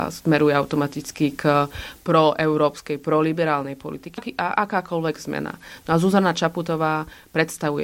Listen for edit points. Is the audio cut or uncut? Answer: cut